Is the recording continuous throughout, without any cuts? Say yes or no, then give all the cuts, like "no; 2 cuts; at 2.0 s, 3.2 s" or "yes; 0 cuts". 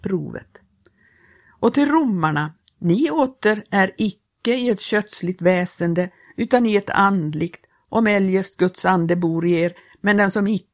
yes; 0 cuts